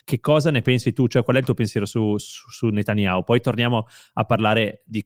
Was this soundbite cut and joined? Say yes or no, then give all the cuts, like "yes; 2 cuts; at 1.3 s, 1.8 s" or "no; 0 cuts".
no; 0 cuts